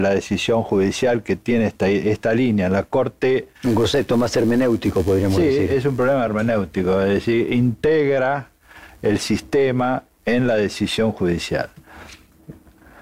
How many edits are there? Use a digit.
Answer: 0